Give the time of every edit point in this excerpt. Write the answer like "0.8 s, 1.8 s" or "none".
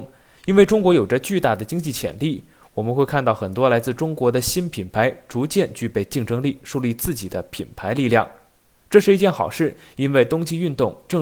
none